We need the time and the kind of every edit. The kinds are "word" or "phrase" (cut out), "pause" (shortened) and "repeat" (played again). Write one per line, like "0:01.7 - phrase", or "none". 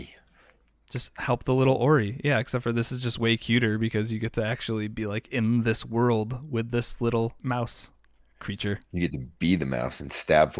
0:07.4 - word